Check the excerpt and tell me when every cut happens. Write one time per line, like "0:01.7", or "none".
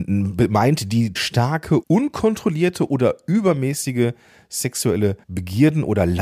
0:01.2
0:01.8
0:05.2